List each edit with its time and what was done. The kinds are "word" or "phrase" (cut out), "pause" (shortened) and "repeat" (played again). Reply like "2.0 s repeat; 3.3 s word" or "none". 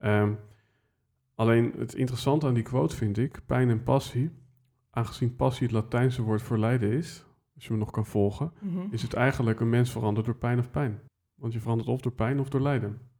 11.1 s pause